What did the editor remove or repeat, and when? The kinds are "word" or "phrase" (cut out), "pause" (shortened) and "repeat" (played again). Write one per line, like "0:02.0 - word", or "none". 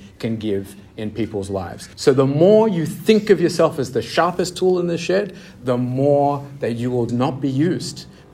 0:01.9 - pause
0:07.1 - word